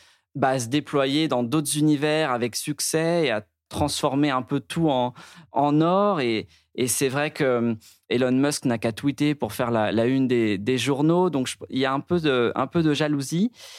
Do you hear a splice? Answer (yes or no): no